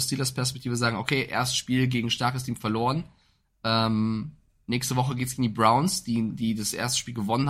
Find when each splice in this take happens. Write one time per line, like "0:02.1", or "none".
none